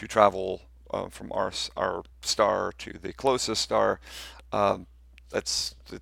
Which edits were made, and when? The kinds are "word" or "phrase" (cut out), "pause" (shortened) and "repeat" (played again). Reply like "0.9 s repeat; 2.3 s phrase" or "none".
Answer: 2.1 s pause